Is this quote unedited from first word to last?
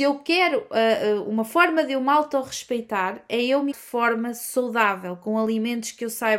no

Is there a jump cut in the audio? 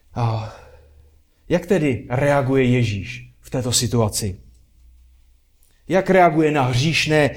no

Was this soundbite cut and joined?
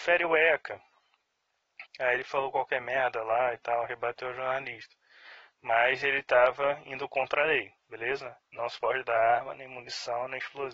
yes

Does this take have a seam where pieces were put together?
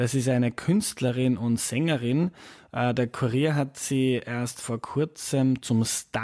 no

